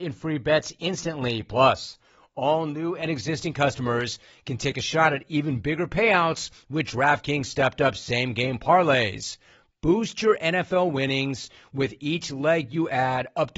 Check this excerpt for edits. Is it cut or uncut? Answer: uncut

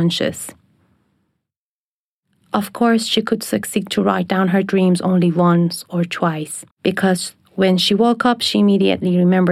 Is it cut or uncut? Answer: cut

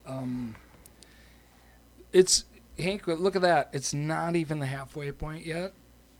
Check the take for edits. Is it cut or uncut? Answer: uncut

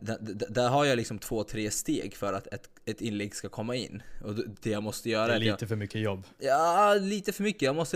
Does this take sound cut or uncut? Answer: uncut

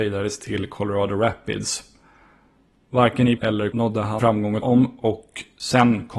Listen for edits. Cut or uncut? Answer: cut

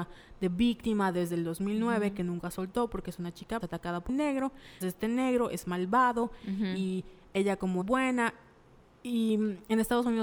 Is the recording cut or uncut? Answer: cut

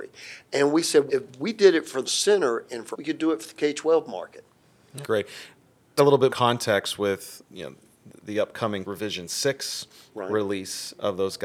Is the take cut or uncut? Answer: cut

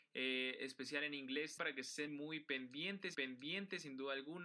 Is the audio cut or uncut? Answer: cut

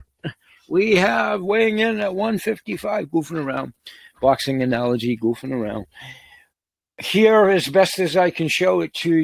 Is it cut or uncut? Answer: uncut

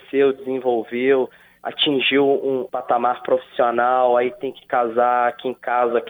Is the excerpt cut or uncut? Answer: uncut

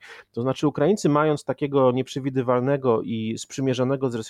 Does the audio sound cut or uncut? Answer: uncut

